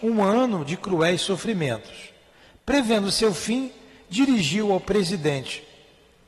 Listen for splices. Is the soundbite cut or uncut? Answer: uncut